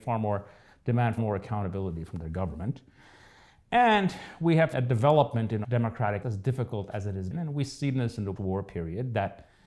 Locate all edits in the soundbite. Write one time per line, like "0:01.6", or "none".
0:01.2
0:04.7
0:05.6
0:06.2
0:07.3
0:08.4